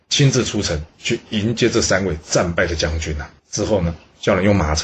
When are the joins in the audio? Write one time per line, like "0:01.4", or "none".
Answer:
0:03.4